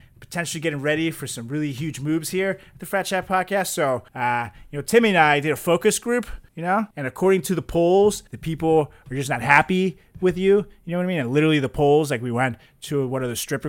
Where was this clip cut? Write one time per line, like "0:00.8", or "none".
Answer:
0:04.1
0:06.5
0:06.9
0:08.3